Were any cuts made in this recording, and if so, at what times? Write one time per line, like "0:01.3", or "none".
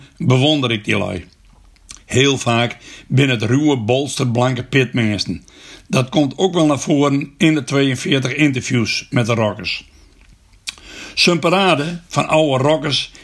none